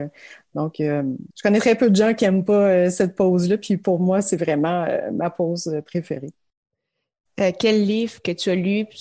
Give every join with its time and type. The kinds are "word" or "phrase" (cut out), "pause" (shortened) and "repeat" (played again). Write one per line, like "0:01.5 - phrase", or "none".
0:01.3 - pause